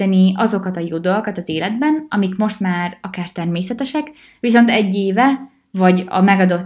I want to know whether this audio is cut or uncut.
uncut